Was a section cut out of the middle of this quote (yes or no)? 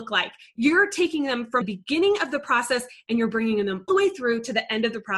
yes